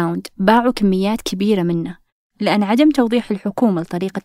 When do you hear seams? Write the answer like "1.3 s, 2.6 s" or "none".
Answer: none